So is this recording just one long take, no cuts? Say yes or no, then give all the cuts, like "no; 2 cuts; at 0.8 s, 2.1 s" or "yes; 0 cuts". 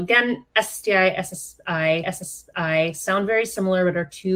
no; 1 cut; at 2.0 s